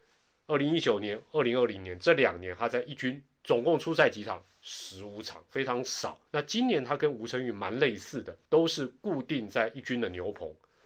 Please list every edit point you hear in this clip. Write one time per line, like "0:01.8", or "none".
0:06.3
0:08.4